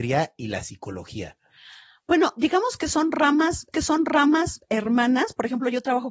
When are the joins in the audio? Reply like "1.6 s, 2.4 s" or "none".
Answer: 3.7 s